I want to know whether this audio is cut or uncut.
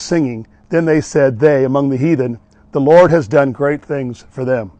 uncut